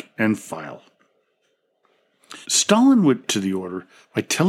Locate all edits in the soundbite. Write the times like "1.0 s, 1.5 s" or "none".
2.4 s, 3.3 s